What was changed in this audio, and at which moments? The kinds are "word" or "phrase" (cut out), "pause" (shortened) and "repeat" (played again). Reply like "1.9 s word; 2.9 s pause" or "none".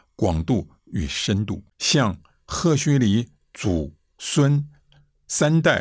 1.7 s pause